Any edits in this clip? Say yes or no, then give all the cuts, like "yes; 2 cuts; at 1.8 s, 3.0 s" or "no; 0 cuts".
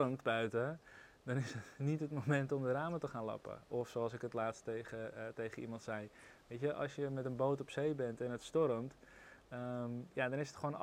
no; 0 cuts